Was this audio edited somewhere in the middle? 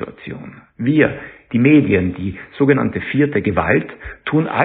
no; 0 cuts

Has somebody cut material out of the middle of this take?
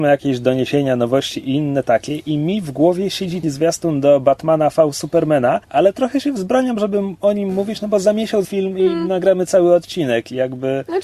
yes; 3 cuts; at 3.4 s, 5.6 s, 8.4 s

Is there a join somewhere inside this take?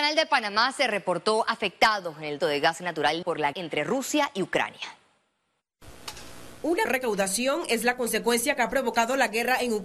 yes; 4 cuts; at 2.4 s, 3.2 s, 3.5 s, 6.9 s

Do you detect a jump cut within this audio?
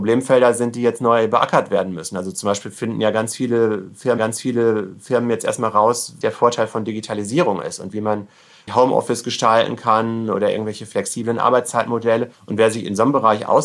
yes; 4 cuts; at 4.2 s, 6.2 s, 8.7 s, 12.3 s

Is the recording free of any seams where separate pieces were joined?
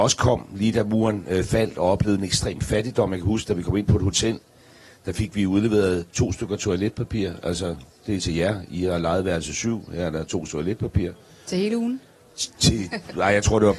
no; 1 cut; at 10.5 s

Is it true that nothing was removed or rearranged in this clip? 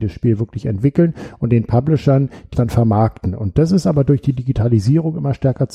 no; 1 cut; at 2.5 s

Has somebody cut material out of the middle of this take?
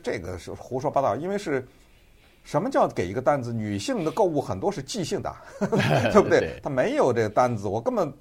no; 0 cuts

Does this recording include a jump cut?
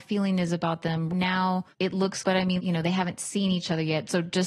yes; 4 cuts; at 1.1 s, 1.7 s, 2.2 s, 2.6 s

